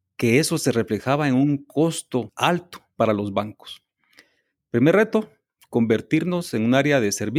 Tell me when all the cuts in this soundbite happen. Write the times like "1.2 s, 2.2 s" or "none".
none